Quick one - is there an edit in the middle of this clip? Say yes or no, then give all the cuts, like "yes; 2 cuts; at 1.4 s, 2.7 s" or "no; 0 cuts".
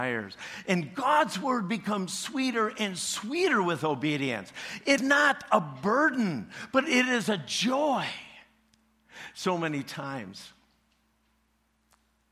yes; 1 cut; at 5.0 s